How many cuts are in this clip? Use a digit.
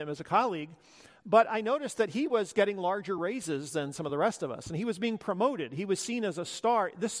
0